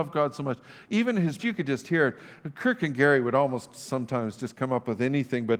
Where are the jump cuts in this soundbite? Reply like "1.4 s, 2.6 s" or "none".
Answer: 1.4 s